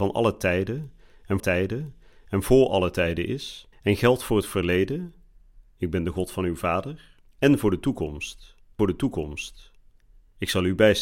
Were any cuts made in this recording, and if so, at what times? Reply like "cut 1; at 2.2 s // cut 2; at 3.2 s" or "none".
cut 1; at 1.4 s // cut 2; at 3.7 s // cut 3; at 7.3 s // cut 4; at 8.8 s